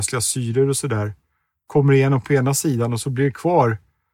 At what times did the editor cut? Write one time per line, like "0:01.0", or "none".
none